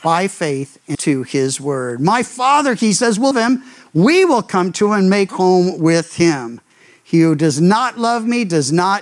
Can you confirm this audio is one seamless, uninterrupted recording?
no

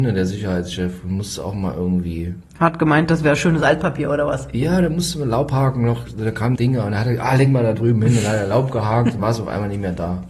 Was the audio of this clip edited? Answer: yes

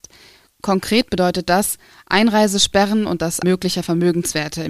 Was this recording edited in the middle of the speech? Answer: yes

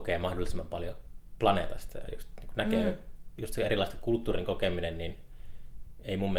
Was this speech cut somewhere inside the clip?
no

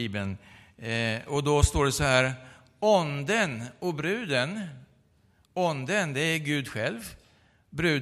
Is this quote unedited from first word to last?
yes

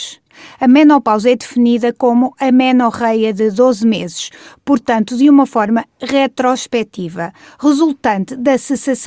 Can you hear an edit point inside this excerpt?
no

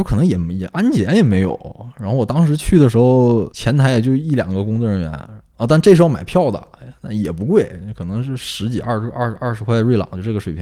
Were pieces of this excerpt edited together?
no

